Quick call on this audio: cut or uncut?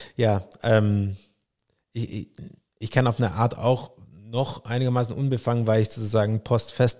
uncut